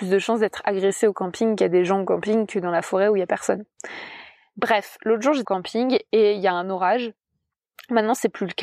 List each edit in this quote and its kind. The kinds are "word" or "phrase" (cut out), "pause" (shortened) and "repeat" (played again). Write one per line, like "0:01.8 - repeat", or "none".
0:01.6 - word
0:05.4 - word